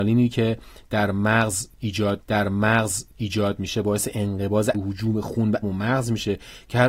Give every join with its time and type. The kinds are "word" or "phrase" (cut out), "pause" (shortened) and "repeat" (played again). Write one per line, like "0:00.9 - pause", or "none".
0:02.2 - repeat
0:04.7 - word
0:05.6 - word